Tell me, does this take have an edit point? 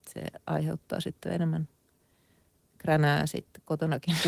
no; 0 cuts

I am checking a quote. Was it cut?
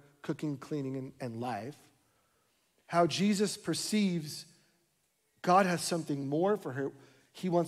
no; 0 cuts

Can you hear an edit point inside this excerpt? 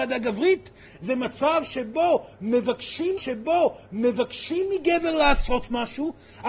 yes; 1 cut; at 3.2 s

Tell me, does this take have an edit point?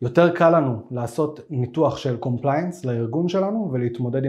no; 0 cuts

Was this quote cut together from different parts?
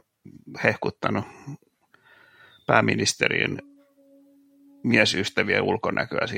no; 0 cuts

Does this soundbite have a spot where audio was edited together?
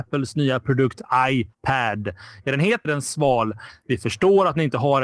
yes; 2 cuts; at 1.5 s, 2.8 s

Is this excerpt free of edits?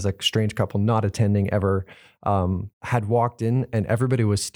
no; 1 cut; at 2.7 s

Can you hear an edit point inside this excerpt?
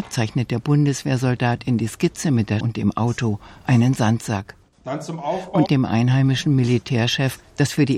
yes; 2 cuts; at 2.6 s, 5.6 s

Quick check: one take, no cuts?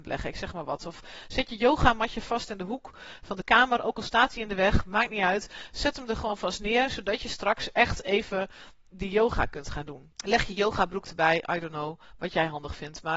no; 1 cut; at 10.2 s

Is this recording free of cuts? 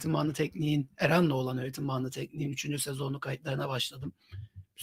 yes; 0 cuts

